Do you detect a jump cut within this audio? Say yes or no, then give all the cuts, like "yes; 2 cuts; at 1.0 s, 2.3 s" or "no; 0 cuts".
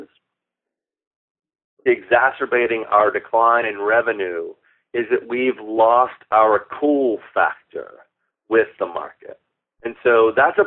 yes; 1 cut; at 1.9 s